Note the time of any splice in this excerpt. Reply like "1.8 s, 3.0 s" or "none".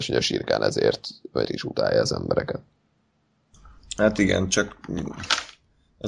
1.4 s